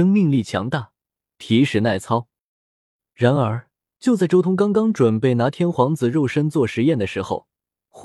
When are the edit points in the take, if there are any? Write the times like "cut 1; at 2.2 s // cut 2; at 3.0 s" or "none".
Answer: cut 1; at 3.8 s